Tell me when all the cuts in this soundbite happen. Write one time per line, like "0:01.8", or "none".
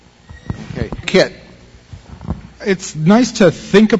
0:01.0